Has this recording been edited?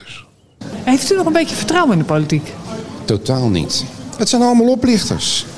no; 0 cuts

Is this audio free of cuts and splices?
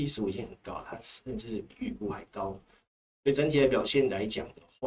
yes; 0 cuts

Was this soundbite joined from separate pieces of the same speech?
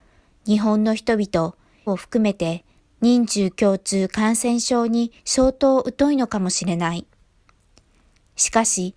yes; 3 cuts; at 1.9 s, 2.8 s, 5.2 s

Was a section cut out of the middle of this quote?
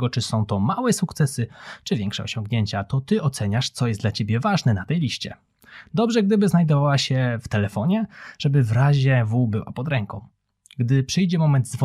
no; 0 cuts

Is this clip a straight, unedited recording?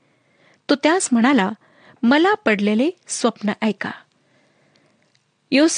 yes; 0 cuts

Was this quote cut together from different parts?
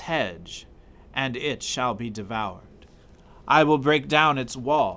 no; 0 cuts

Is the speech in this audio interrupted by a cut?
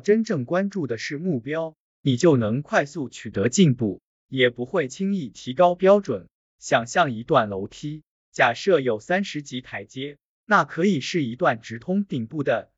no; 0 cuts

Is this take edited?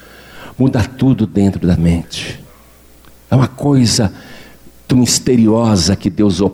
yes; 2 cuts; at 1.8 s, 4.9 s

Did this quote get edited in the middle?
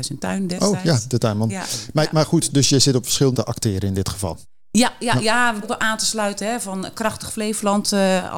yes; 3 cuts; at 2.5 s, 3.3 s, 5.6 s

